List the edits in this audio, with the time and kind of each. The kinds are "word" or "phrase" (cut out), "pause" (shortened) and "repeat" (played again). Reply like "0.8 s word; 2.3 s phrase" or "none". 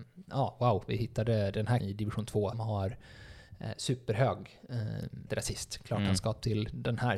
1.8 s word; 2.5 s word; 5.3 s word